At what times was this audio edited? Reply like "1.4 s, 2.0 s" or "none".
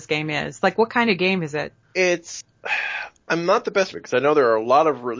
1.8 s, 3.9 s